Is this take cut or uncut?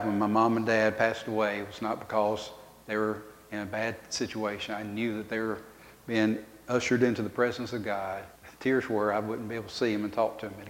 cut